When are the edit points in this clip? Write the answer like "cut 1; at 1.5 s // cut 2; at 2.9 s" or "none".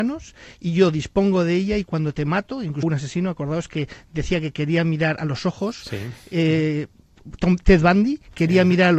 cut 1; at 2.8 s